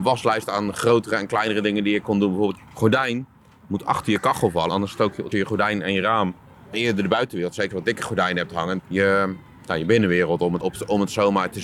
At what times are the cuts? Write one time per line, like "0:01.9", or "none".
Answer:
0:02.6
0:04.7
0:05.3
0:06.7
0:07.7
0:08.8
0:10.6